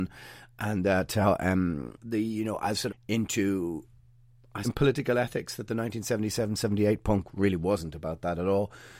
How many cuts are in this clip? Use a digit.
3